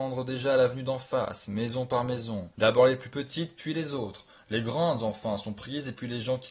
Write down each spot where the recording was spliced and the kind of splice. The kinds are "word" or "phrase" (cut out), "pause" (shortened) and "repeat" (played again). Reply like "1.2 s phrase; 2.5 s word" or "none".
2.5 s pause